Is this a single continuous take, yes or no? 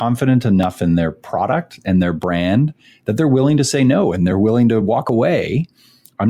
yes